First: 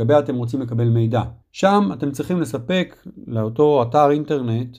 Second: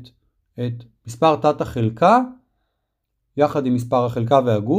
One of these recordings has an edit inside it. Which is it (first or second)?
first